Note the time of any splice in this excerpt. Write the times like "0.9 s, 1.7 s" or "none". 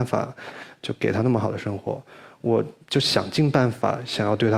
2.8 s